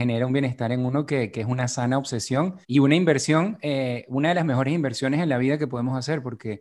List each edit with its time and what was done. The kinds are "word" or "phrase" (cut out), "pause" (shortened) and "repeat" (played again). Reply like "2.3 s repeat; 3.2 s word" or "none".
2.6 s pause

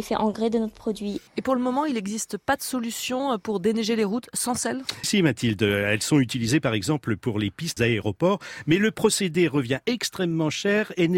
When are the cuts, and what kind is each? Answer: 1.3 s pause; 5.0 s word; 7.8 s word

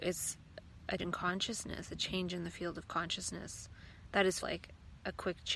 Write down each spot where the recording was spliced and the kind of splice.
1.0 s word; 4.4 s word

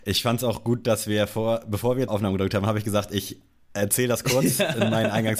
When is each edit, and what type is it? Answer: 2.1 s word

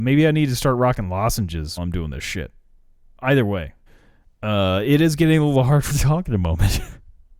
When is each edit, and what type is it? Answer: 1.8 s word; 3.2 s word; 3.9 s pause; 5.9 s word

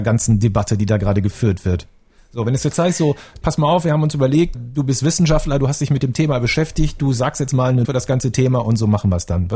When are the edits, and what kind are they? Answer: 3.4 s word; 4.5 s word; 7.8 s word

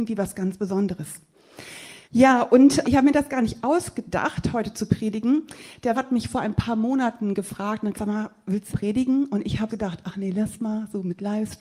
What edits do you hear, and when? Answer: 2.0 s pause; 2.8 s word; 6.0 s word; 7.9 s word; 8.7 s phrase; 9.7 s word

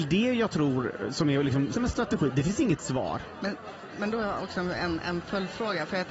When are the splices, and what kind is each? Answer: 1.8 s word

